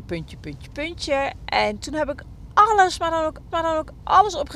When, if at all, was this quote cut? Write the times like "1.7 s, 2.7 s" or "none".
3.5 s

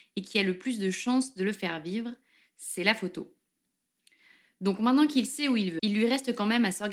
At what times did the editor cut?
5.8 s

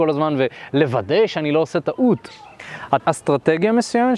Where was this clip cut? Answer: 3.0 s

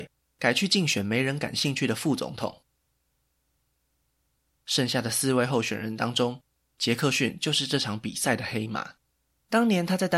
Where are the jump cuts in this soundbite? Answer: none

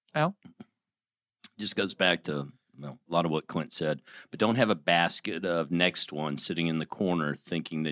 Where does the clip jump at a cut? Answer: none

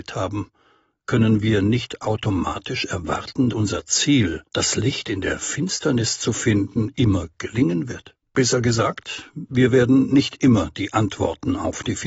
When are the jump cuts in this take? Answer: 3.5 s, 4.5 s, 8.2 s

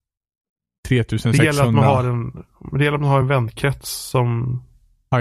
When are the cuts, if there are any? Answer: none

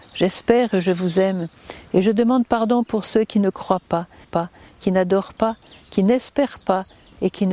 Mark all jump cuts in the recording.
4.2 s

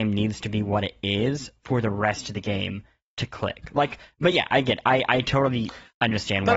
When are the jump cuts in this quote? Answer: none

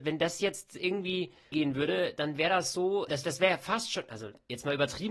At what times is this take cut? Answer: 1.5 s, 3.1 s

